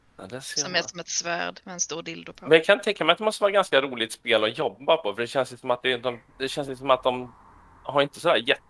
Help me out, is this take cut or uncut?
cut